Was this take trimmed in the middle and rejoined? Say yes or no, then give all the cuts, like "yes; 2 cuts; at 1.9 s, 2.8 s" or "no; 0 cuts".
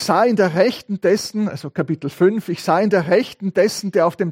no; 0 cuts